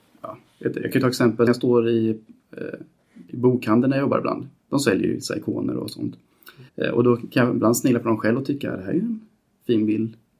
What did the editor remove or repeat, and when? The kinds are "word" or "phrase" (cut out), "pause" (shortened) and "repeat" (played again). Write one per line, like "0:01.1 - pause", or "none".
0:01.5 - phrase
0:04.6 - pause
0:06.7 - pause

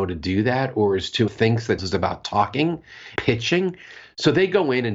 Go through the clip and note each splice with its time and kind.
0:01.3 - phrase
0:01.8 - word
0:03.2 - word

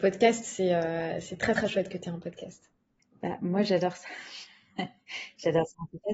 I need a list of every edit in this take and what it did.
none

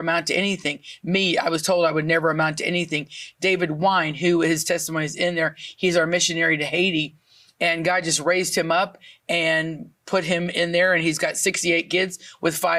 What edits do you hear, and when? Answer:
none

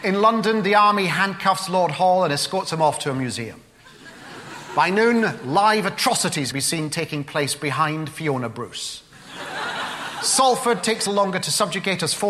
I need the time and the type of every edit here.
0:06.5 - word
0:11.1 - word

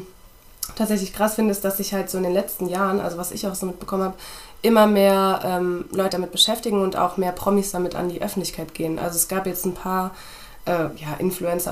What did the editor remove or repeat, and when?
0:06.1 - word

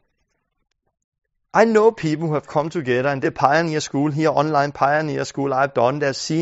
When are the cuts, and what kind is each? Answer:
0:03.2 - phrase

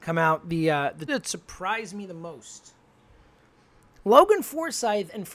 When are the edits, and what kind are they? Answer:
0:01.1 - word

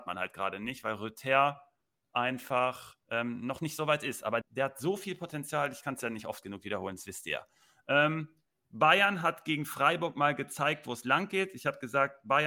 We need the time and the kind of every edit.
0:03.0 - pause
0:04.4 - word

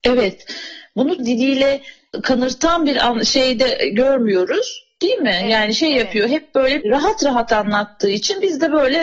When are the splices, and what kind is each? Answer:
0:01.2 - phrase
0:06.8 - word

